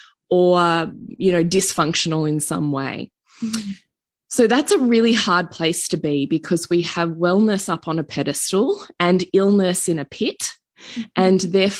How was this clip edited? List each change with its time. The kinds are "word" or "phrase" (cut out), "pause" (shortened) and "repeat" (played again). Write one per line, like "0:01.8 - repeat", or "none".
none